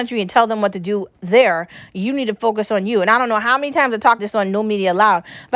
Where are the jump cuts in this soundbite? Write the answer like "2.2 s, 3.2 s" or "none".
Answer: 4.2 s

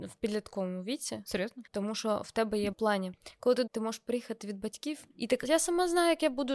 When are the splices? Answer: 1.7 s, 2.7 s, 3.7 s, 5.1 s, 5.4 s

